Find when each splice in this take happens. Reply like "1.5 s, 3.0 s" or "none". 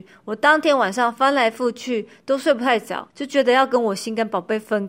3.1 s